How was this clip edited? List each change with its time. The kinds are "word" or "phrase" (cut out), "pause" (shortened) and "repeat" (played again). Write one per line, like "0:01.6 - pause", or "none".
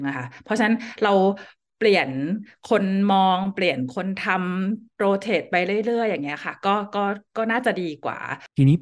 none